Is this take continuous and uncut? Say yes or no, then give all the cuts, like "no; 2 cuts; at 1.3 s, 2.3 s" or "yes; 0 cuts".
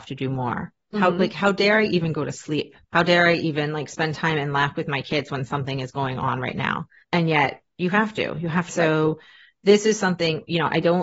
no; 3 cuts; at 2.8 s, 7.0 s, 8.7 s